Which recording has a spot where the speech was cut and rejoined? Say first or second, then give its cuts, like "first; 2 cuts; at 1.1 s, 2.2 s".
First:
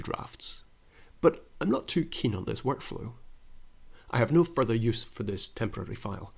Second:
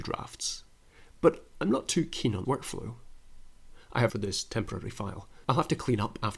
second; 3 cuts; at 2.4 s, 4.1 s, 5.4 s